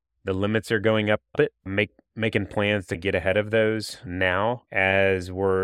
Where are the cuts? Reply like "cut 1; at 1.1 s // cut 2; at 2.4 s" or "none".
cut 1; at 1.3 s // cut 2; at 4.7 s